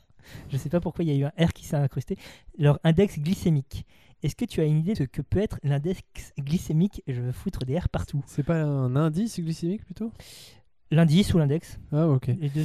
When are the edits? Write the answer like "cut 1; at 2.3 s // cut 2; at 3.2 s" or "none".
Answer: cut 1; at 4.9 s